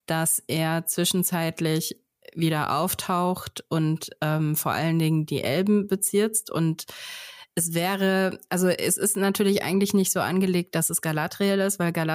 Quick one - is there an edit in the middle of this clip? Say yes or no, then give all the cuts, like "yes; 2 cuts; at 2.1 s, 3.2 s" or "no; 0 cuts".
no; 0 cuts